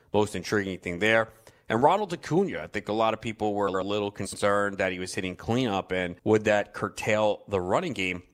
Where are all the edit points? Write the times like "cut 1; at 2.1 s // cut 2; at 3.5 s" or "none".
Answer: cut 1; at 6.2 s